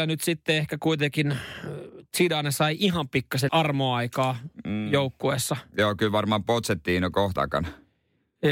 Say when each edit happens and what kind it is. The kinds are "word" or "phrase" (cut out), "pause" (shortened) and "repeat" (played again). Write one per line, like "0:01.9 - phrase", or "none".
0:03.5 - phrase
0:07.4 - phrase